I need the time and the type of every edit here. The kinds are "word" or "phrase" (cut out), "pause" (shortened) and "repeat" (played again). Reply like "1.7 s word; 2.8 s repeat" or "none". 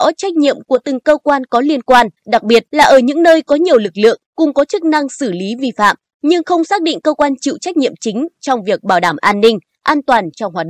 2.2 s pause; 2.7 s pause